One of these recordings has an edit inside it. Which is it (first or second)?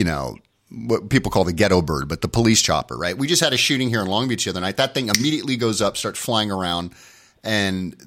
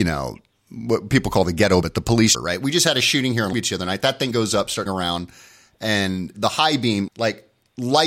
second